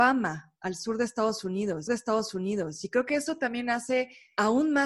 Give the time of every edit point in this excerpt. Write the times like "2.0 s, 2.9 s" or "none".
1.9 s